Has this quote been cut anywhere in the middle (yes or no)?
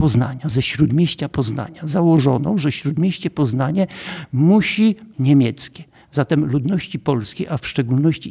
yes